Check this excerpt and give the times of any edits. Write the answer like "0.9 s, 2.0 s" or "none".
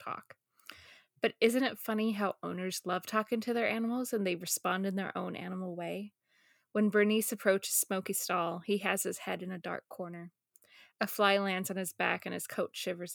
none